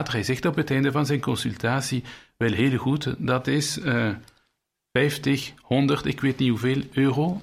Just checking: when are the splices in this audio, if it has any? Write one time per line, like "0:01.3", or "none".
none

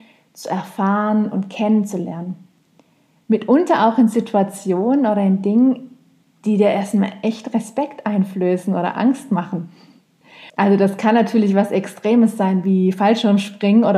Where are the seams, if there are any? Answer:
0:10.5

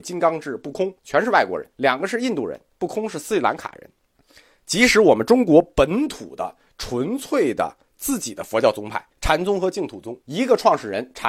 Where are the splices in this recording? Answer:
0:01.0
0:01.7
0:04.1
0:09.1
0:10.2

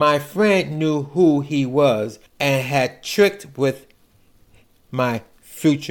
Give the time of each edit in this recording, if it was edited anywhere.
0:02.3

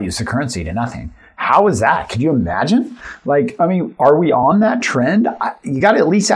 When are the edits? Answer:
none

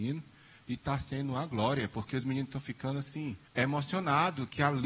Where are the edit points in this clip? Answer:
0:03.4

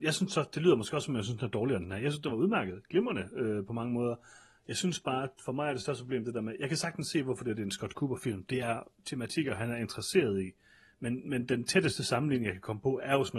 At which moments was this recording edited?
none

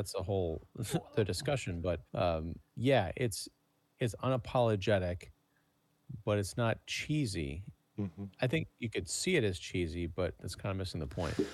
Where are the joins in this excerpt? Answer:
0:02.1

